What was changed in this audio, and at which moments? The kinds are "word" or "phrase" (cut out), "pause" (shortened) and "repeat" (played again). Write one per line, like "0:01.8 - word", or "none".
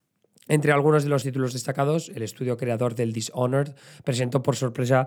0:01.2 - word